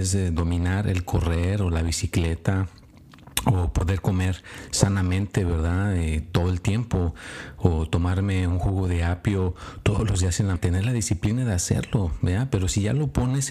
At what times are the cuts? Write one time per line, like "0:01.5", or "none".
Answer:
0:10.6